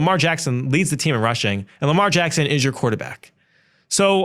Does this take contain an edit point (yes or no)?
no